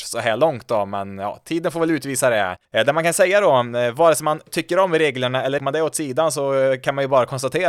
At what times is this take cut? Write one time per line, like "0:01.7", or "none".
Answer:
0:02.6
0:05.6